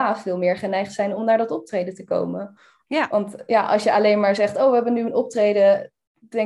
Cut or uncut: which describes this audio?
uncut